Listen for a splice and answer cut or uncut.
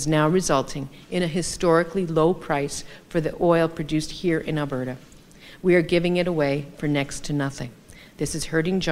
uncut